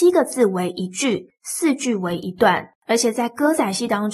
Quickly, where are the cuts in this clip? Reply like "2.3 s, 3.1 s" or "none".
2.8 s

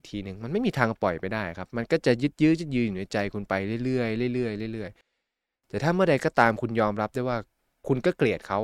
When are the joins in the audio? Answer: none

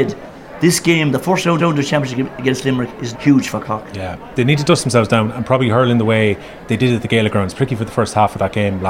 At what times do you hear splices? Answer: 1.6 s, 3.1 s

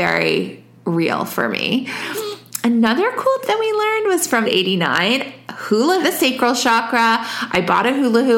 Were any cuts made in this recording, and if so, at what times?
3.4 s, 4.4 s, 6.0 s

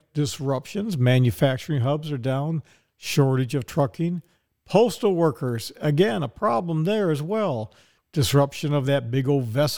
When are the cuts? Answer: none

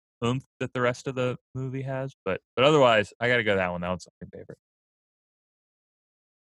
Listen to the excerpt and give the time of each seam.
4.3 s

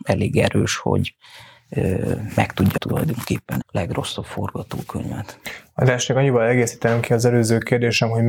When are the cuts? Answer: 2.8 s, 3.6 s

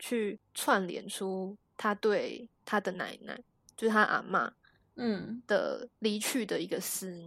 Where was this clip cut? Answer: none

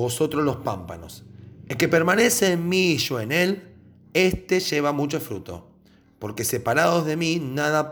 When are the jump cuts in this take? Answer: none

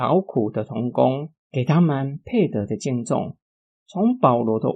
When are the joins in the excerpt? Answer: 1.4 s

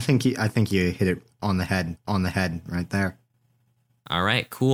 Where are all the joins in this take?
2.0 s

